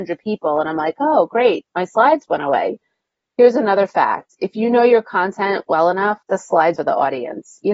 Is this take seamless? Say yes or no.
no